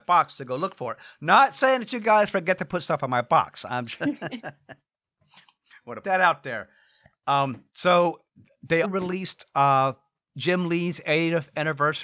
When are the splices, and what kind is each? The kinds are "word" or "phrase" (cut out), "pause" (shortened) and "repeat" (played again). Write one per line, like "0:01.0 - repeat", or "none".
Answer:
0:06.0 - word
0:07.7 - pause
0:08.8 - word